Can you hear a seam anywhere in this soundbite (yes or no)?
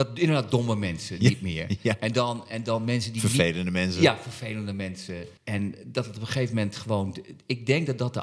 yes